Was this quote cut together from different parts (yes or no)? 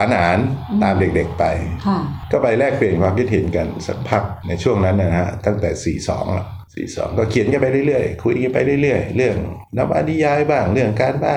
yes